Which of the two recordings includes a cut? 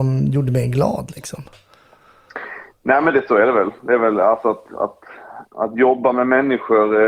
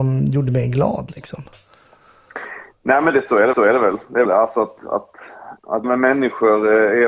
second; 3 cuts; at 3.5 s, 4.2 s, 5.8 s

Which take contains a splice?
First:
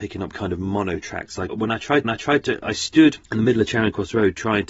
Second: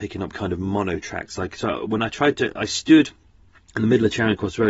first; 3 cuts; at 1.5 s, 2.0 s, 3.2 s

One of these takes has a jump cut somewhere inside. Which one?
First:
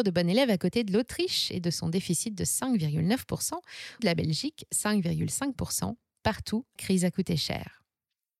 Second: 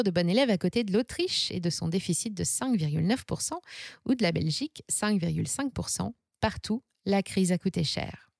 first; 2 cuts; at 4.0 s, 6.8 s

